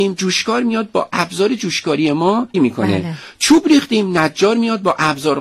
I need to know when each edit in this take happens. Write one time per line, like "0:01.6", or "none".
0:02.5